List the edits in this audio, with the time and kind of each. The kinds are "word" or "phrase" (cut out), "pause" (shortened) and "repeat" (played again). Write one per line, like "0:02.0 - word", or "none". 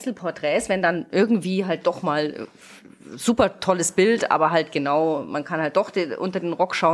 none

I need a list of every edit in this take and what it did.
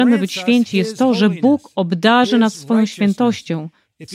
none

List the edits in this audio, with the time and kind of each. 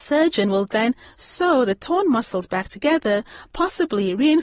none

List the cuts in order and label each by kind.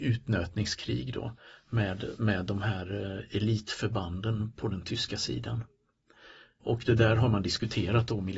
none

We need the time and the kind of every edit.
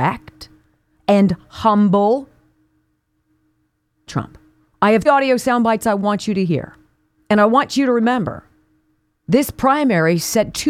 0:04.1 - word
0:05.1 - word

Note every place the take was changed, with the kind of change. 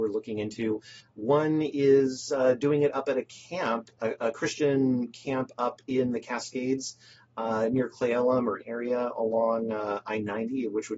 0:04.0 - word
0:08.6 - word

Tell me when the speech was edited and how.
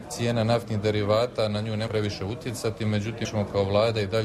0:01.9 - word
0:03.2 - word

